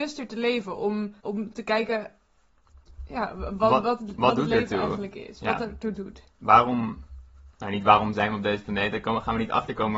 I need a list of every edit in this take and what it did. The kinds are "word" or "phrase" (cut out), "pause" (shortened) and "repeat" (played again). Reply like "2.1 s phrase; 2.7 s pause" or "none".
1.2 s pause; 7.5 s pause